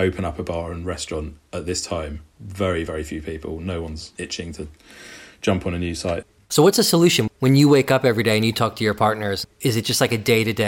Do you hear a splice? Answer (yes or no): no